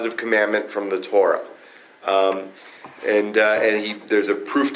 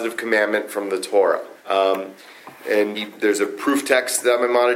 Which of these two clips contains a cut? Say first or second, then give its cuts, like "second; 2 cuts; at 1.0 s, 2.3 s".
second; 2 cuts; at 1.6 s, 2.9 s